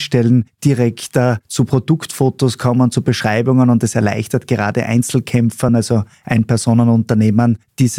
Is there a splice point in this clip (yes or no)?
no